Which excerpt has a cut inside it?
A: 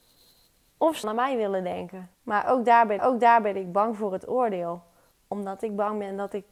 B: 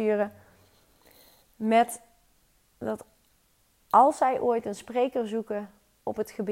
A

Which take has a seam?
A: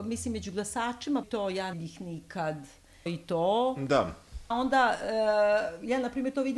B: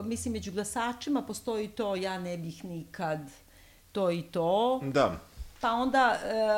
A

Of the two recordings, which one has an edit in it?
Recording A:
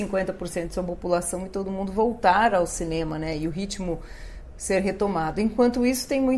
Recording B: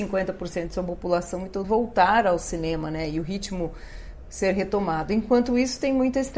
B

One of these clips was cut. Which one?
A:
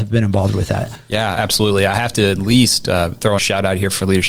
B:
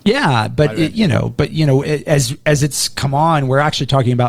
A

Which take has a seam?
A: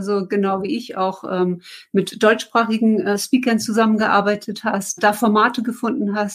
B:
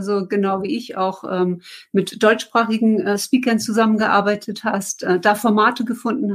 A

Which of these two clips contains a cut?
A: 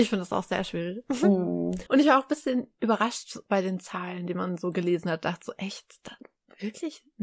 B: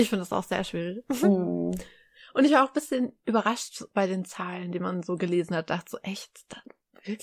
A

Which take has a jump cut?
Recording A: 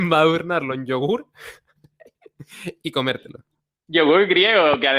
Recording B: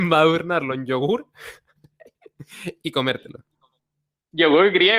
A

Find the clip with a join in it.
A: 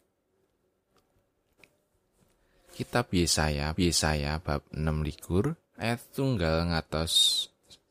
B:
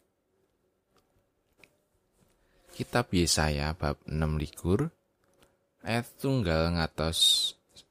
A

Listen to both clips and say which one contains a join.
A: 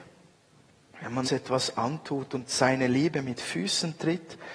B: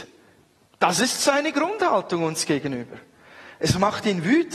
A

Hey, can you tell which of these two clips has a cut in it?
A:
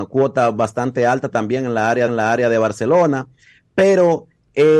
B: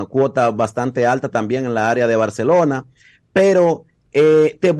A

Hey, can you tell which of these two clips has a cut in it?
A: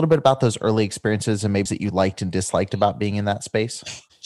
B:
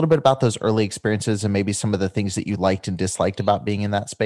A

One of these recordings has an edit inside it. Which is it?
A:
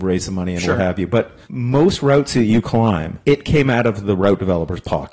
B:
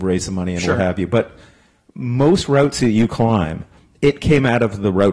A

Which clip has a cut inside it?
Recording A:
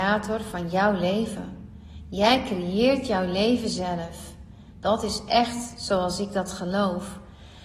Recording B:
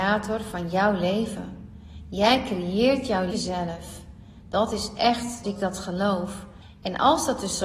B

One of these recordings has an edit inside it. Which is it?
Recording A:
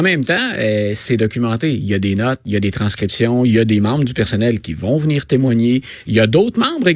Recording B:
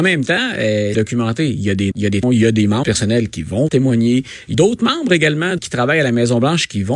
B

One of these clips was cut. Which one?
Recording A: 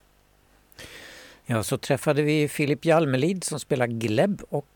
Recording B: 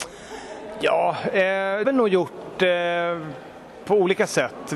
B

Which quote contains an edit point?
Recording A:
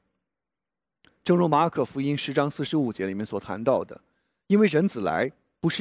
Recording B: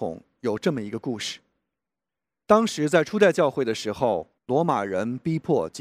B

